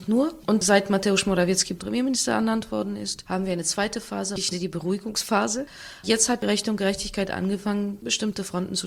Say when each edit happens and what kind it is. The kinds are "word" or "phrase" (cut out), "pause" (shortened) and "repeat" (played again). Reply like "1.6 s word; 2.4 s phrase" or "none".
1.8 s word; 4.5 s word